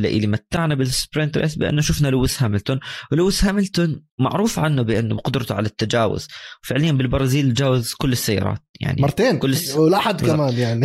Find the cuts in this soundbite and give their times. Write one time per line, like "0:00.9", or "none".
0:04.1